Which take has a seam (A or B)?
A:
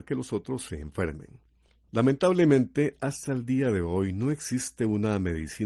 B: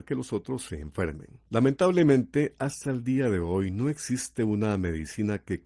B